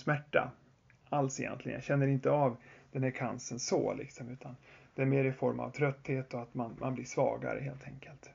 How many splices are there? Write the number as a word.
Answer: zero